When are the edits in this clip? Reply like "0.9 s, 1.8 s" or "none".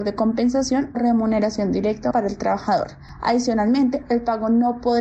0.9 s, 2.1 s